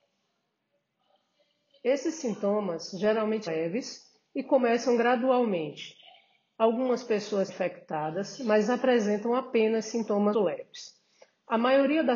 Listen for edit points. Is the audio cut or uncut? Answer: cut